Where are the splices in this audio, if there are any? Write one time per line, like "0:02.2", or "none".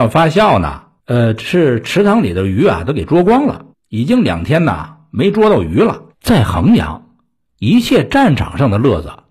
0:01.0
0:03.7
0:06.1